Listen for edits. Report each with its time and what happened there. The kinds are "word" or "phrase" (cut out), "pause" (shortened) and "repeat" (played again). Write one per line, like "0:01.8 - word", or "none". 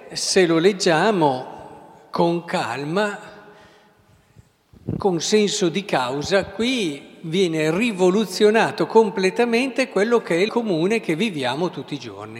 0:10.5 - phrase